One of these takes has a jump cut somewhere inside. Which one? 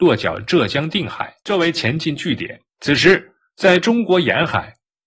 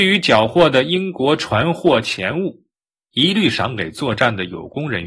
first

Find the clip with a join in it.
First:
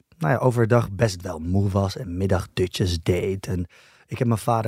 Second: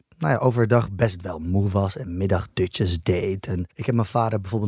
second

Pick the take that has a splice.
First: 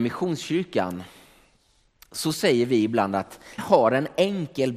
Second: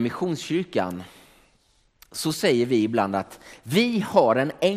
first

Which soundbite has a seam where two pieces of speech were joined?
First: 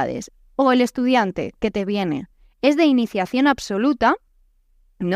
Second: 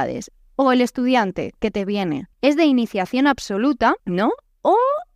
second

